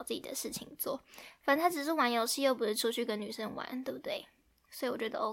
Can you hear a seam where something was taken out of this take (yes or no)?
no